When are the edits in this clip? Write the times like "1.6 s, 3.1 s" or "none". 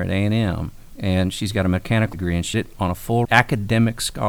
2.1 s, 2.5 s, 3.2 s